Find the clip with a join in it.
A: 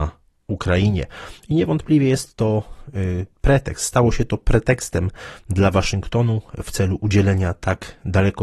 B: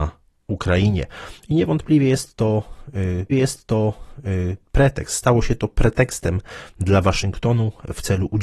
B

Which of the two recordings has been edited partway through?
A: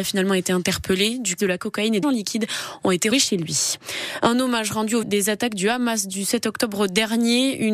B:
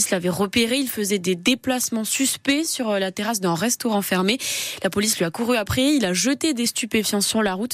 A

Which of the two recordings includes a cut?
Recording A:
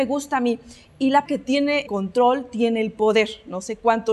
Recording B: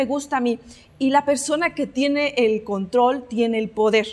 A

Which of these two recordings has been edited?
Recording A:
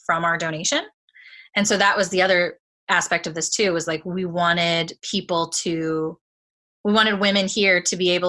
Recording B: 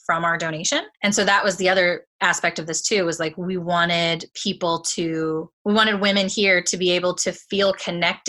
B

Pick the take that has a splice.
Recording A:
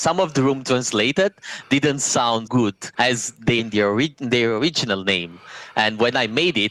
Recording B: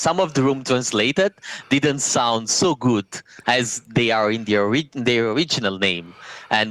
A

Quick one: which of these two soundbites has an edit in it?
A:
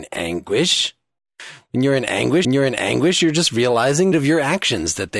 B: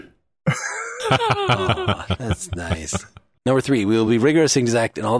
A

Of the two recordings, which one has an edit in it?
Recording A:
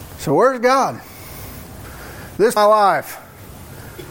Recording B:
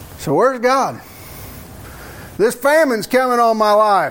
A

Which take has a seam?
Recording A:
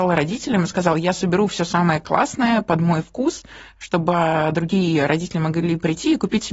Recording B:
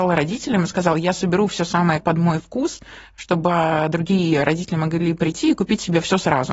B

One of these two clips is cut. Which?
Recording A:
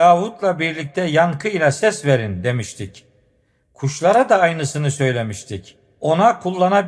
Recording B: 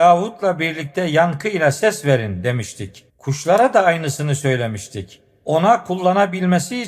B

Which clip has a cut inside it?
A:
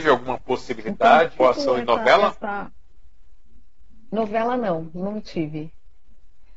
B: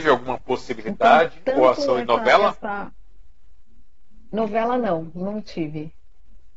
A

